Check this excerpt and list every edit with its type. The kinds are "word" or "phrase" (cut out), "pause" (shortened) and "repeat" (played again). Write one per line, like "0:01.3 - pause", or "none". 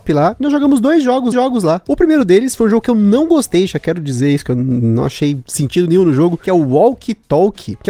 0:01.3 - repeat

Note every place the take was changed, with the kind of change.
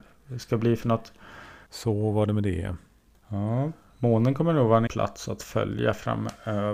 0:04.9 - word

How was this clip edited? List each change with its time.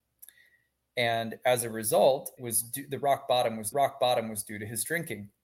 0:02.4 - word
0:03.7 - repeat

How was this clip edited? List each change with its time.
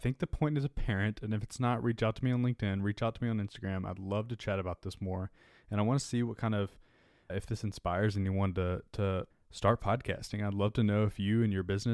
0:09.3 - pause

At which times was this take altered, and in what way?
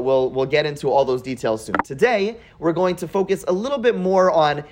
none

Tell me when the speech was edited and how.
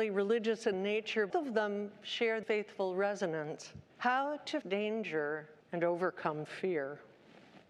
0:01.3 - word
0:02.4 - word
0:03.9 - pause
0:04.6 - word
0:05.6 - pause

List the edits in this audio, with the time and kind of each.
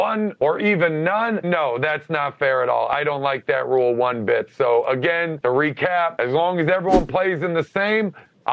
0:01.4 - word

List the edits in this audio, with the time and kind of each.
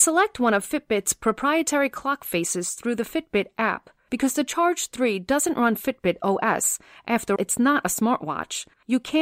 0:07.4 - word

